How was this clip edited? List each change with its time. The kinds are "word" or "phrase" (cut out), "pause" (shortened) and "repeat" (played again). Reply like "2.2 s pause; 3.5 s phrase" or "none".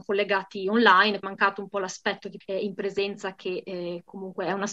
1.2 s word; 2.4 s word